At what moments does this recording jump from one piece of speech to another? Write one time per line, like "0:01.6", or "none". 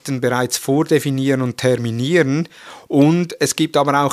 none